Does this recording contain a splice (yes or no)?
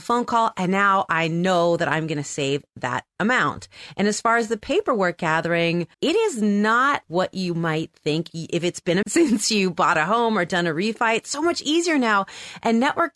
yes